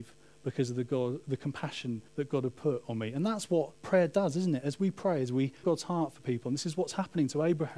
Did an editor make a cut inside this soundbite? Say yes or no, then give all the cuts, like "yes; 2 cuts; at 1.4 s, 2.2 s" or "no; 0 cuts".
yes; 3 cuts; at 2.1 s, 3.7 s, 5.6 s